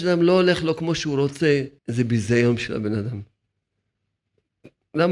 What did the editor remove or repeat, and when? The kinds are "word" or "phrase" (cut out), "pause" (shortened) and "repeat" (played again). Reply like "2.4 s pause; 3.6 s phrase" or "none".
1.8 s pause